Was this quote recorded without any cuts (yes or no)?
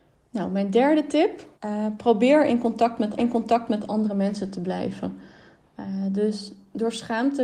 no